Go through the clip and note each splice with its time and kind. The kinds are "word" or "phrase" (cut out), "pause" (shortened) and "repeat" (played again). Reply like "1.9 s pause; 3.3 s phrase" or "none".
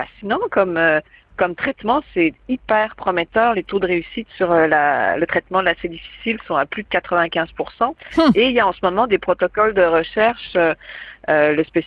none